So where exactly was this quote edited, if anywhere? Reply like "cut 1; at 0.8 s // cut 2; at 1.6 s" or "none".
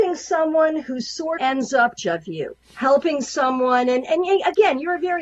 cut 1; at 1.4 s // cut 2; at 2.0 s // cut 3; at 2.6 s